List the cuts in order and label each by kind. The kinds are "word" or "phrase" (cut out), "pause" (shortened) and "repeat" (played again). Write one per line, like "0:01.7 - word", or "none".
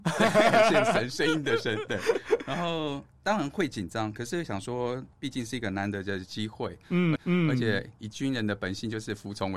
0:07.2 - repeat